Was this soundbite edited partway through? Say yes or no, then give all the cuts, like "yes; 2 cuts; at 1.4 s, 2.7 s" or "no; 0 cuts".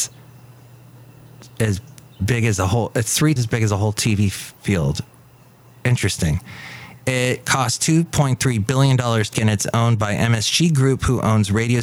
yes; 2 cuts; at 3.4 s, 9.3 s